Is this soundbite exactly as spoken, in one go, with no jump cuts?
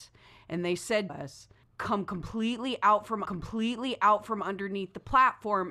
no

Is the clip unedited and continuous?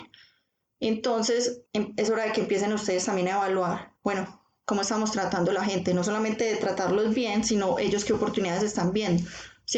no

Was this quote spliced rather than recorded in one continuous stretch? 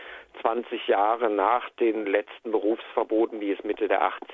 no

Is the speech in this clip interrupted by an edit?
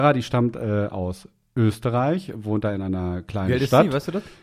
no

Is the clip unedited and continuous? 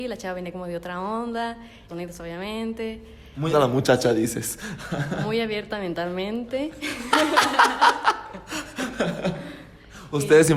no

